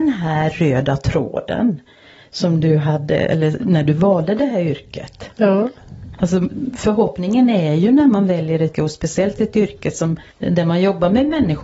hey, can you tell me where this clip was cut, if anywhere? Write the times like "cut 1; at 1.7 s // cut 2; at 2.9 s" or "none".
cut 1; at 8.7 s